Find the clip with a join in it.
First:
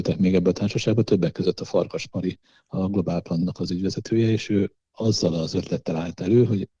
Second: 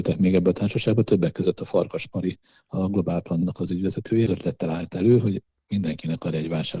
second; 1 cut; at 4.3 s

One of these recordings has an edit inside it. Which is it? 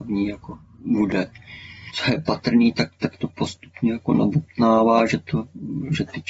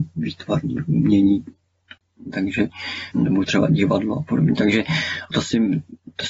second; 2 cuts; at 3.1 s, 5.3 s

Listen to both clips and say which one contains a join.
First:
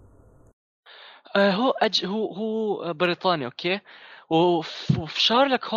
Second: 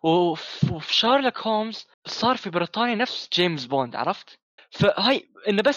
second; 2 cuts; at 1.9 s, 4.6 s

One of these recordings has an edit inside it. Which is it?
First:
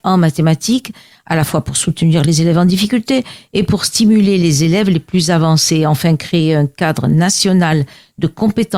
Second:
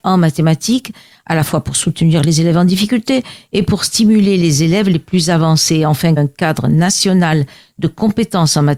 second; 1 cut; at 6.2 s

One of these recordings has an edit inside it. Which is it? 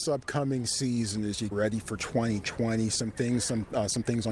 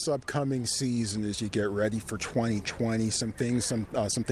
first; 1 cut; at 1.5 s

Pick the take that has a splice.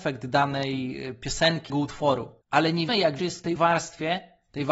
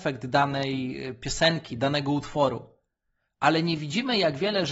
first; 5 cuts; at 1.7 s, 2.4 s, 2.9 s, 3.2 s, 3.6 s

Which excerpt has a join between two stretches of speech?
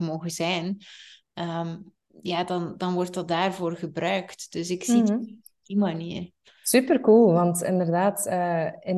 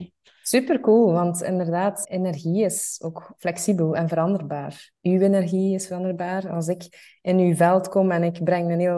second; 1 cut; at 2.0 s

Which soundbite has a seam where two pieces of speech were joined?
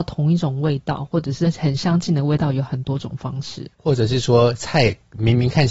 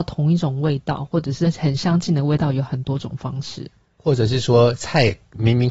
first; 1 cut; at 3.7 s

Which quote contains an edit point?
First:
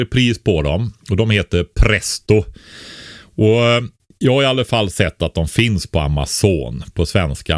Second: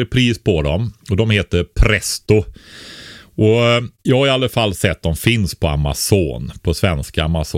second; 2 cuts; at 4.0 s, 5.0 s

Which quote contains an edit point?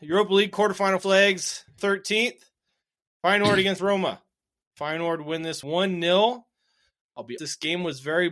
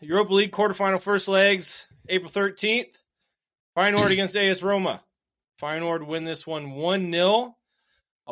first; 5 cuts; at 1.0 s, 1.8 s, 3.8 s, 5.6 s, 7.4 s

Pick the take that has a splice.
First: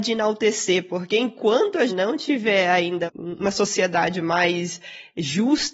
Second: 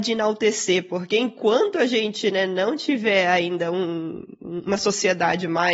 first; 2 cuts; at 1.9 s, 3.1 s

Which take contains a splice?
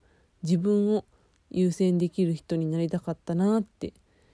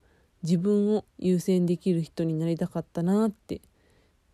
second; 1 cut; at 1.1 s

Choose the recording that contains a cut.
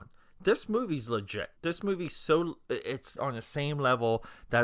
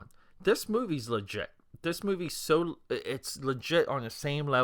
first; 2 cuts; at 1.6 s, 3.2 s

